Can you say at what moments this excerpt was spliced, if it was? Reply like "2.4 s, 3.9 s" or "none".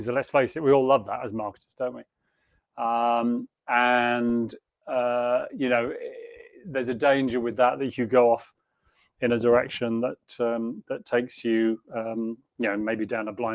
none